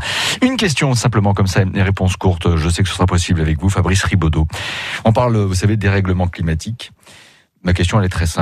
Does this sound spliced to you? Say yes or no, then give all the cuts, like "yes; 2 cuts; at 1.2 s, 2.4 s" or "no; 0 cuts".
no; 0 cuts